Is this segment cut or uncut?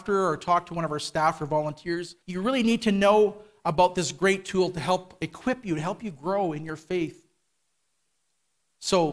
cut